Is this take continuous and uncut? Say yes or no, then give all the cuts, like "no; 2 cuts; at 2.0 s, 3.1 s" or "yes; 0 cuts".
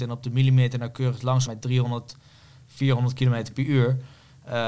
no; 1 cut; at 1.5 s